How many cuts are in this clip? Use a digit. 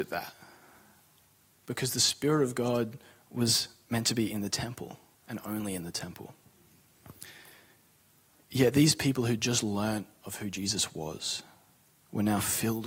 0